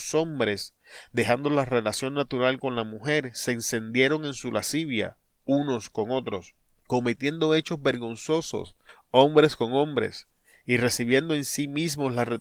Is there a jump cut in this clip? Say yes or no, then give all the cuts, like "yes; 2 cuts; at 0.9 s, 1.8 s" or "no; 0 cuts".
no; 0 cuts